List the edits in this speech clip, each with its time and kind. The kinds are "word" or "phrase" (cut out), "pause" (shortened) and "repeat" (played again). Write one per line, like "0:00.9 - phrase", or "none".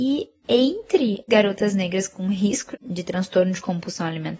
0:01.3 - phrase
0:02.7 - word